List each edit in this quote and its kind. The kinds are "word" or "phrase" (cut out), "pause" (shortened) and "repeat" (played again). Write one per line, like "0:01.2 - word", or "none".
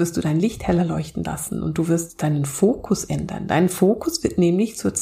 none